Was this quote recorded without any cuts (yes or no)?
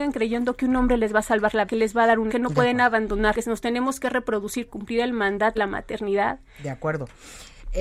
no